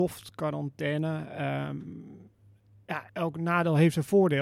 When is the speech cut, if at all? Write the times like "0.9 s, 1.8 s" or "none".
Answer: 3.1 s